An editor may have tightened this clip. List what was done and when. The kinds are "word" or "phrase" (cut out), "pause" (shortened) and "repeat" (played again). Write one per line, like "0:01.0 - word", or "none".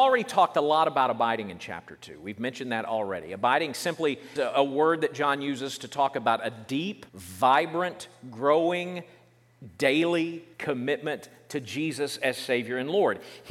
0:04.4 - word
0:07.1 - pause
0:10.5 - pause